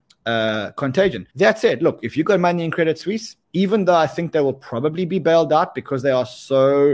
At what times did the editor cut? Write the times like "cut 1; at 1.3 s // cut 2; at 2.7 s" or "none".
cut 1; at 1.3 s // cut 2; at 3.4 s